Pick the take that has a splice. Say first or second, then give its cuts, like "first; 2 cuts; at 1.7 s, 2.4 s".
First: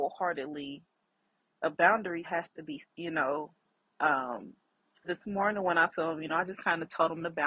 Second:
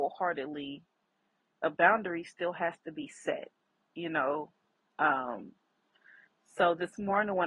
first; 4 cuts; at 2.2 s, 2.8 s, 5.0 s, 5.9 s